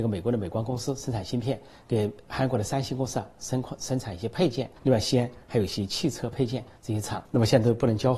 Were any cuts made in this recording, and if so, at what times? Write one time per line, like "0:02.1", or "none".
0:04.8
0:07.3